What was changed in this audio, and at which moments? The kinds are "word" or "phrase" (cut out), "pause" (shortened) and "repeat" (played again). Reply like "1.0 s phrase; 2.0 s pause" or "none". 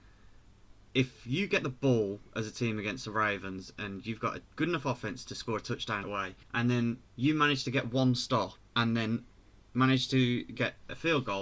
4.5 s pause; 6.0 s word; 6.4 s pause; 7.1 s pause; 8.6 s pause